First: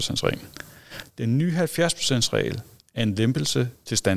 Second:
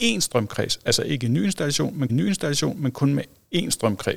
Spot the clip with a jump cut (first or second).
second